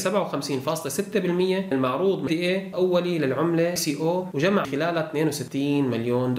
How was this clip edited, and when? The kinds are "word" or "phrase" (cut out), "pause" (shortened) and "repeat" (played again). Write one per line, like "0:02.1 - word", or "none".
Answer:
0:01.7 - word
0:02.3 - word
0:02.7 - word
0:03.8 - word
0:04.6 - word